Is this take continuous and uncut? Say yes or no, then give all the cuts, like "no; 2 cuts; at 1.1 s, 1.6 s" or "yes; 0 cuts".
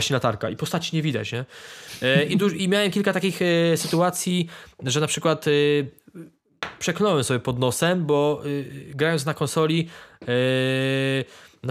yes; 0 cuts